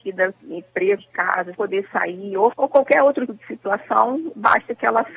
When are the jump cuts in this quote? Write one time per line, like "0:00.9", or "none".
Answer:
0:01.0
0:01.5
0:02.5
0:03.3